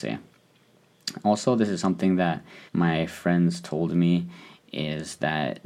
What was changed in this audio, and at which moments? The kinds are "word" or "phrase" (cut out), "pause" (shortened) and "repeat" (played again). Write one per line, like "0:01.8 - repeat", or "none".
0:02.7 - pause

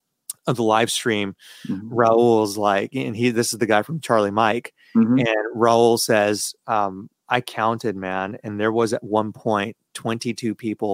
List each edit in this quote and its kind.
none

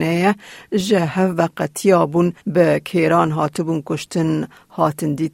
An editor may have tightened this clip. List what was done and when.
0:02.4 - pause

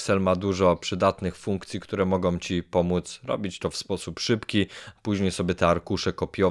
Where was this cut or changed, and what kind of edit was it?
none

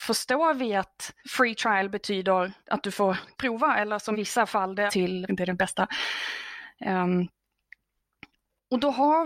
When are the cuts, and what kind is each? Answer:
0:01.2 - pause
0:02.6 - pause
0:03.4 - word
0:04.1 - word
0:04.9 - word
0:05.3 - phrase

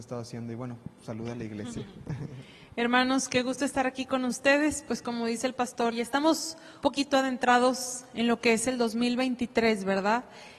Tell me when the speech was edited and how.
0:05.9 - word
0:06.8 - word

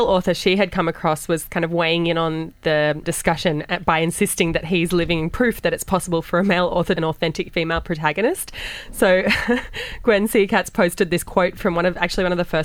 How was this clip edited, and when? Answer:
0:03.0 - word
0:07.0 - phrase

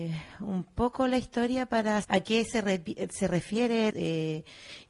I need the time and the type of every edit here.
0:02.0 - word
0:03.9 - phrase

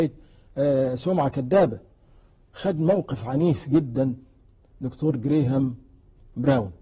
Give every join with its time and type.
none

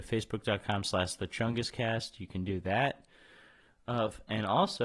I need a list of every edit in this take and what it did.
none

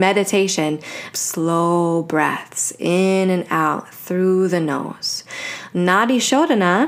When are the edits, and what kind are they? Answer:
0:01.1 - phrase

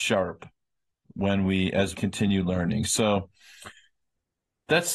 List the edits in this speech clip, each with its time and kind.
0:01.9 - word

